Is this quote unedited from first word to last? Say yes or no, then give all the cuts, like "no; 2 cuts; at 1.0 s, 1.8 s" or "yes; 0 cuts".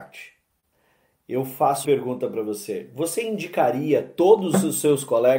no; 1 cut; at 1.8 s